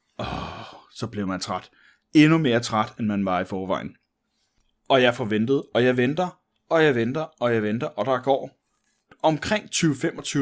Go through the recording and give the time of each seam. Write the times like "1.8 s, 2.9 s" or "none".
none